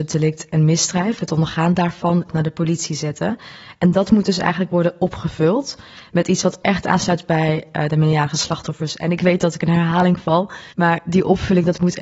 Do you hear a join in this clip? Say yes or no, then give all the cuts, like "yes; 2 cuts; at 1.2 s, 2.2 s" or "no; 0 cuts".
yes; 2 cuts; at 2.3 s, 10.7 s